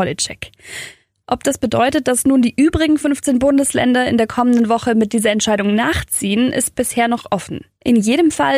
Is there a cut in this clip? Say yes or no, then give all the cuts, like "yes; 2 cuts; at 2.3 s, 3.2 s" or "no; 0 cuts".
no; 0 cuts